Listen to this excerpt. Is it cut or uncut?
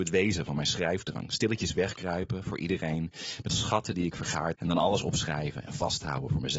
cut